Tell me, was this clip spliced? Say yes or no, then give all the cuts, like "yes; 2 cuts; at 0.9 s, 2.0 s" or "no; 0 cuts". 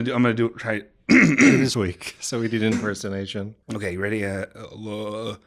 yes; 3 cuts; at 1.7 s, 2.7 s, 3.6 s